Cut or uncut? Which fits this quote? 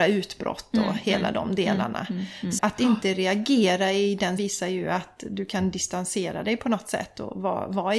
cut